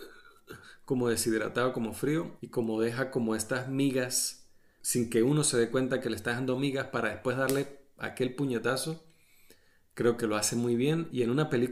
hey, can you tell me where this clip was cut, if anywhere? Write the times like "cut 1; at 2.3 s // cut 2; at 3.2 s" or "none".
none